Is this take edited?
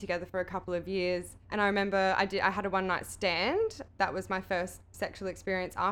yes; 2 cuts; at 1.4 s, 3.9 s

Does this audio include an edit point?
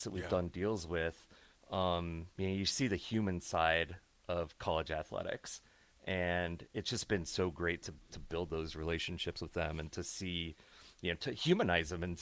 yes; 1 cut; at 2.3 s

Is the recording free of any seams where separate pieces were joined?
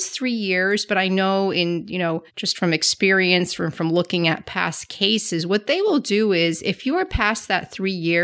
no; 1 cut; at 2.3 s

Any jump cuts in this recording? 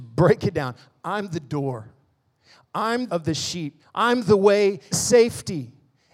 yes; 3 cuts; at 3.1 s, 3.8 s, 4.9 s

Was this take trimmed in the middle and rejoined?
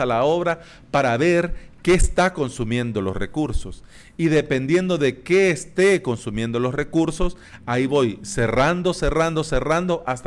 no; 0 cuts

